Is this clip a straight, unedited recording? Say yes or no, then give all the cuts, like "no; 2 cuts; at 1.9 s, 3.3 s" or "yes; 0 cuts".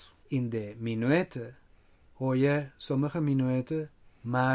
yes; 0 cuts